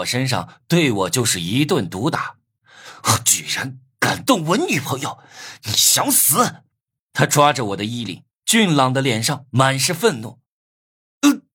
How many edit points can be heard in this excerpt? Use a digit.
2